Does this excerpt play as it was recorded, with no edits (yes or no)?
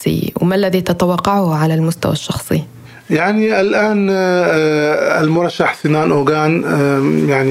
yes